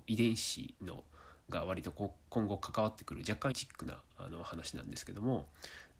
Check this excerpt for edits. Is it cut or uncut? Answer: cut